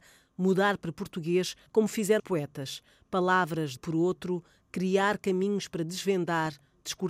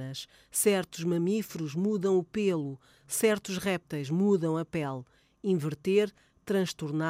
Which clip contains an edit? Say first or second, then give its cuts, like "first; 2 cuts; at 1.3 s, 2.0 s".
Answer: first; 3 cuts; at 1.7 s, 2.2 s, 3.8 s